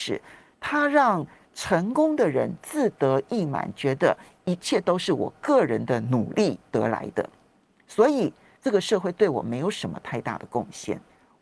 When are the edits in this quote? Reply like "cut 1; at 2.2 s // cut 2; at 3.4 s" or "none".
none